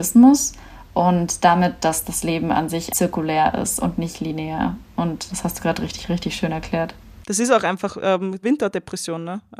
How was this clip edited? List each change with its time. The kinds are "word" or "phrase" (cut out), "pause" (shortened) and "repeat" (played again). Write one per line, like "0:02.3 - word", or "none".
0:02.9 - word
0:05.3 - word
0:08.4 - phrase

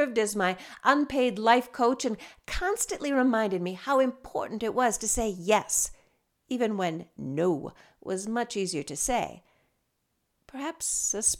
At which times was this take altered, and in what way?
none

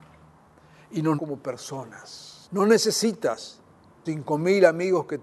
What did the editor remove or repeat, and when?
0:01.2 - word
0:02.4 - pause
0:04.1 - word

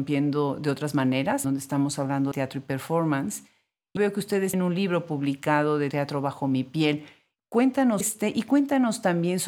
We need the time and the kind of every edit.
0:01.4 - word
0:02.3 - word
0:04.0 - word
0:04.5 - word
0:05.9 - word
0:08.0 - word

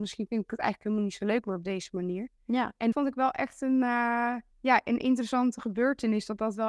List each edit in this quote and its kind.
0:02.9 - word
0:04.5 - pause

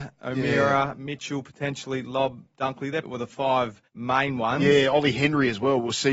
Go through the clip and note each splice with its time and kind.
0:03.0 - word
0:03.9 - pause

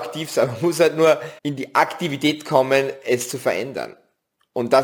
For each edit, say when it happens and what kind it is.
0:01.4 - pause

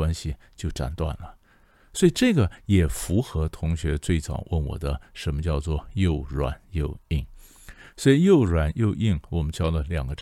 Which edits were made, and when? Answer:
none

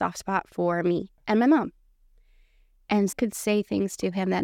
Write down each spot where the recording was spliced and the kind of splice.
0:01.2 - pause
0:03.1 - phrase

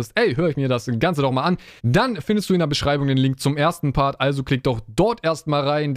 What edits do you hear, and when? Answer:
0:01.8 - pause

